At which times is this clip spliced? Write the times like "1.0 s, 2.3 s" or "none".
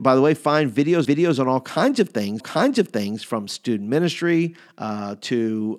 1.1 s, 2.4 s